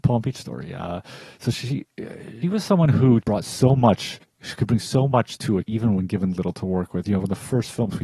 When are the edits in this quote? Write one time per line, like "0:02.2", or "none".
0:02.4
0:03.2
0:04.2
0:05.7